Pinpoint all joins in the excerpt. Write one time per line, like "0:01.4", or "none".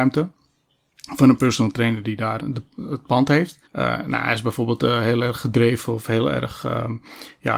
0:02.4
0:03.7